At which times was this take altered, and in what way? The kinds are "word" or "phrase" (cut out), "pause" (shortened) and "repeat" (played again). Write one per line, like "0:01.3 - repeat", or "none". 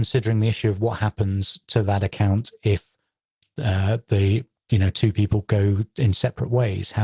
none